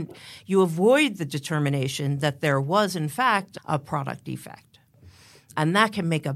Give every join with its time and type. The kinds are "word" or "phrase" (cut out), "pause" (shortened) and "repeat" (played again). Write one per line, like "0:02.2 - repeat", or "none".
none